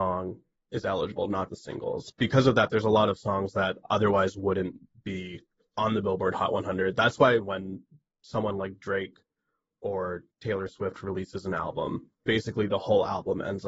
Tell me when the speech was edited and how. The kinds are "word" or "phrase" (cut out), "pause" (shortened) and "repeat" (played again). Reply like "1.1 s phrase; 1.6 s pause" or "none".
1.5 s word